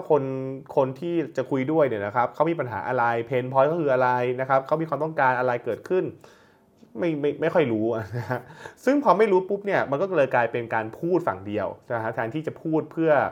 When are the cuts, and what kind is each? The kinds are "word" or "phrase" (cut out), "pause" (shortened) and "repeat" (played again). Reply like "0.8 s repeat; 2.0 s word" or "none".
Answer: none